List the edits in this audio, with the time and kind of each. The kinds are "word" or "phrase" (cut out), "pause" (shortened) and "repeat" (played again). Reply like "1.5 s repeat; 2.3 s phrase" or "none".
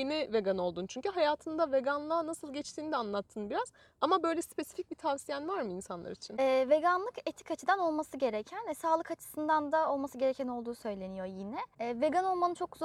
none